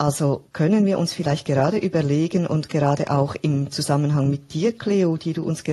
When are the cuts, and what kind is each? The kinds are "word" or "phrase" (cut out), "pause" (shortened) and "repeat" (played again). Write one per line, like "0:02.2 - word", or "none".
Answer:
none